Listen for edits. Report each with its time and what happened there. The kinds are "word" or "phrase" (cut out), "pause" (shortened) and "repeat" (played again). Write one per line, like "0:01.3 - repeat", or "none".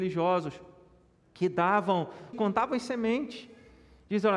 0:02.3 - phrase